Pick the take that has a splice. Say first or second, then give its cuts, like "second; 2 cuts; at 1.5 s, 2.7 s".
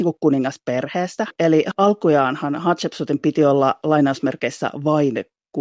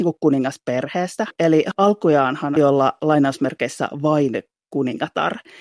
second; 1 cut; at 2.6 s